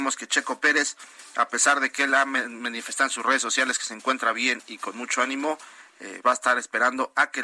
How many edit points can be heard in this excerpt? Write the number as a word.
one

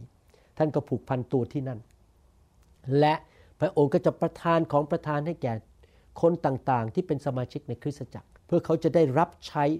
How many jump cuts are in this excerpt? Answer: one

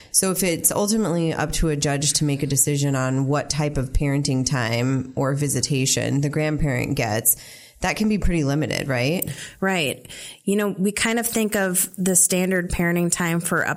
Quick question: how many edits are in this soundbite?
zero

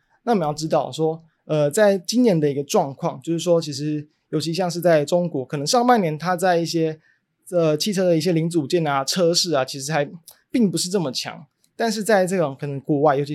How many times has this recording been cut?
zero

